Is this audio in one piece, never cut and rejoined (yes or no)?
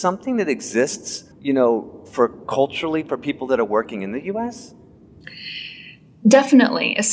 no